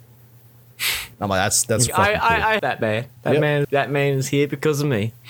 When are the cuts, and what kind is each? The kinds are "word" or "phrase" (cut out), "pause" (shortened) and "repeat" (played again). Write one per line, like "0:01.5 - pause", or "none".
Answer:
0:01.1 - pause
0:01.9 - word
0:02.6 - word
0:03.2 - pause
0:03.6 - word

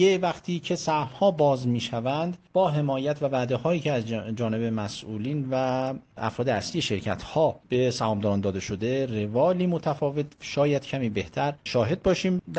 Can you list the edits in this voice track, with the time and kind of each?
none

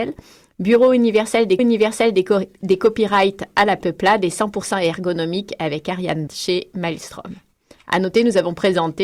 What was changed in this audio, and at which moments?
0:01.6 - repeat
0:06.3 - word

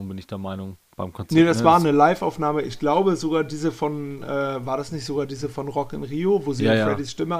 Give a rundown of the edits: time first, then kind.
none

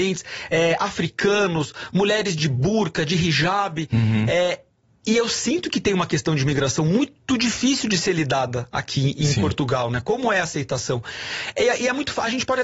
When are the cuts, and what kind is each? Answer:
none

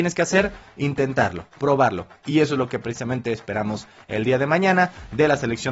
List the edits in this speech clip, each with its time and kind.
none

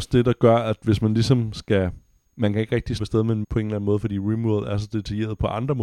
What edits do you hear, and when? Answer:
0:02.2 - pause
0:03.0 - word
0:03.4 - word

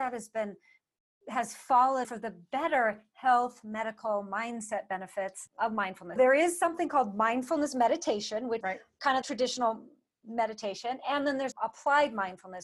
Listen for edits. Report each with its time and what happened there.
0:02.0 - word
0:06.2 - word
0:08.6 - word
0:09.2 - word
0:11.5 - word

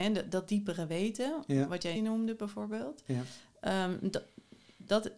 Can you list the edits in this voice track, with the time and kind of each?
0:02.0 - word

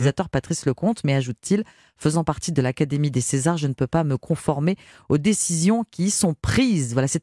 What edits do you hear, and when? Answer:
none

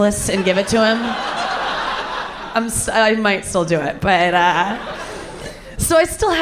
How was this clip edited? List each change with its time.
none

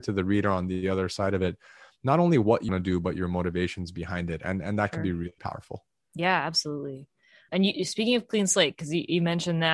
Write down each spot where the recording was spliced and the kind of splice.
0:02.7 - word
0:05.4 - word
0:07.5 - word

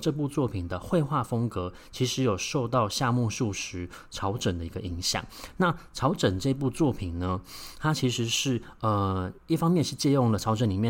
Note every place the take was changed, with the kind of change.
0:09.4 - pause

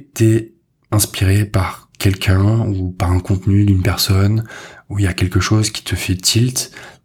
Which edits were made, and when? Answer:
none

